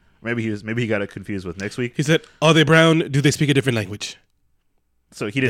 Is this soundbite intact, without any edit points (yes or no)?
yes